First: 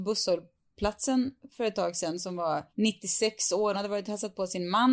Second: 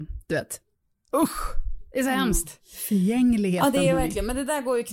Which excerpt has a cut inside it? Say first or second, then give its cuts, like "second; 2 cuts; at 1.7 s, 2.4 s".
first; 2 cuts; at 2.7 s, 3.7 s